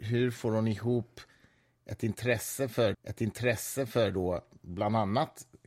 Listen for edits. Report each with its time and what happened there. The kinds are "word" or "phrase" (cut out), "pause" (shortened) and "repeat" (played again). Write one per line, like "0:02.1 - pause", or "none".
0:02.9 - repeat